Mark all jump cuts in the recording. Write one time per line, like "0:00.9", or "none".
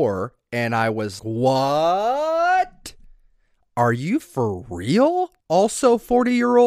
0:01.2
0:04.2
0:05.4